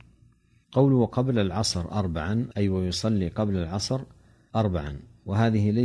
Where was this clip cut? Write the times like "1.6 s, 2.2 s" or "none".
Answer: none